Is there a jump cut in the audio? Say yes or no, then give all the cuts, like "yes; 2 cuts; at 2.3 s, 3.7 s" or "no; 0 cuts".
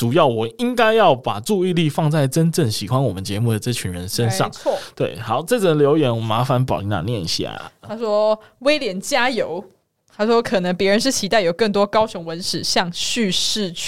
no; 0 cuts